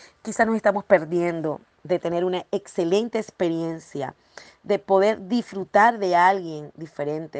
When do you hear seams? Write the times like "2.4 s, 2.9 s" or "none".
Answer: none